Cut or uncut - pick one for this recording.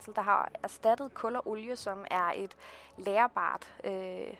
uncut